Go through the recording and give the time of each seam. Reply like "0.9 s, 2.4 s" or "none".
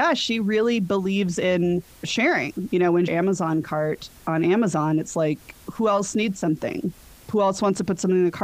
1.9 s, 3.1 s